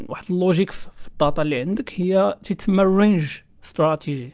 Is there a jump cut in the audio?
no; 0 cuts

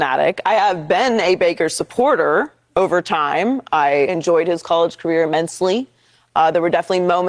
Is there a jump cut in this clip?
yes; 1 cut; at 4.1 s

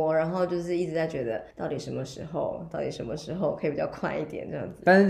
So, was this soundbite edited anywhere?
yes; 1 cut; at 1.5 s

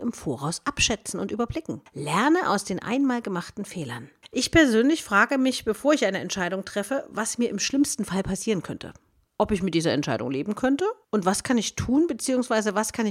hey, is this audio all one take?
yes; 0 cuts

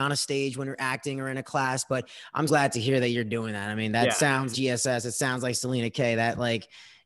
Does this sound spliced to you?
yes; 2 cuts; at 2.5 s, 4.5 s

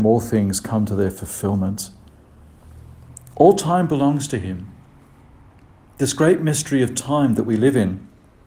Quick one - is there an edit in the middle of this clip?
no; 0 cuts

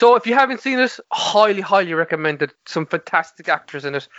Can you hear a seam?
yes; 2 cuts; at 1.0 s, 2.6 s

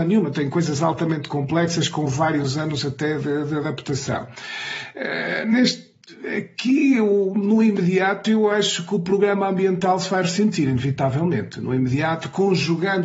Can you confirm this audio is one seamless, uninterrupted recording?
yes; 0 cuts

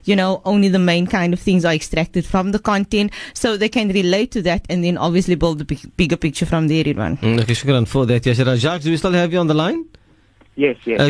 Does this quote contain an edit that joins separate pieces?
no; 0 cuts

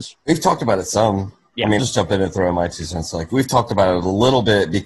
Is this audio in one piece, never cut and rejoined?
no; 2 cuts; at 1.8 s, 3.3 s

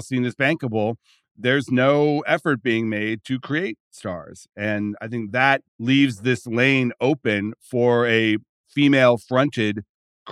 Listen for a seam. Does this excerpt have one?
yes; 1 cut; at 5.7 s

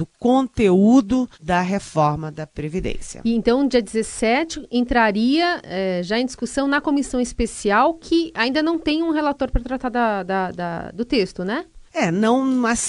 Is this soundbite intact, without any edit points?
no; 2 cuts; at 1.3 s, 11.9 s

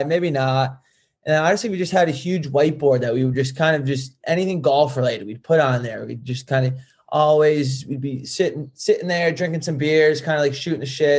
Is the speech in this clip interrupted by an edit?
no; 0 cuts

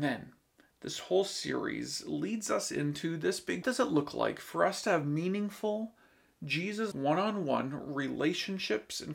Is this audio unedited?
no; 2 cuts; at 3.6 s, 6.9 s

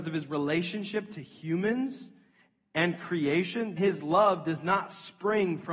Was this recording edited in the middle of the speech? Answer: yes; 1 cut; at 3.8 s

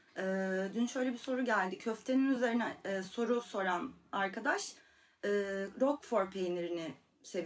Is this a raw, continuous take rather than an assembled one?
yes; 0 cuts

